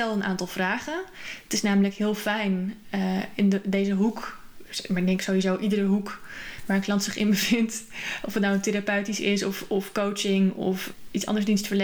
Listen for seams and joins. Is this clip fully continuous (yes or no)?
yes